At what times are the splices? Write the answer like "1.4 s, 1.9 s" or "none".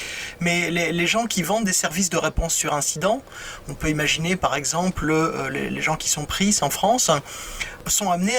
none